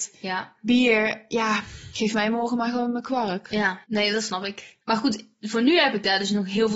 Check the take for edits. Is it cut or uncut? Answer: cut